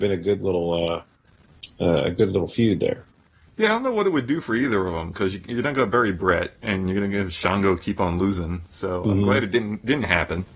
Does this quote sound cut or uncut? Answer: uncut